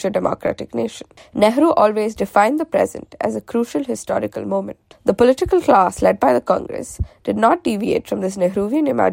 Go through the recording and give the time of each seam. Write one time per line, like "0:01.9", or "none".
none